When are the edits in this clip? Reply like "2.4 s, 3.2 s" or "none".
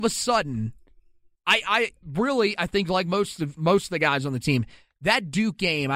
2.0 s